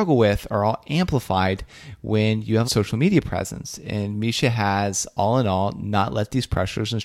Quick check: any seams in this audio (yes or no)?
yes